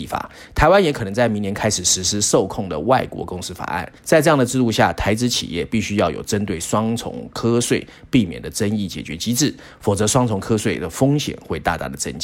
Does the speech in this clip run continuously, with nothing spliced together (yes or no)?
no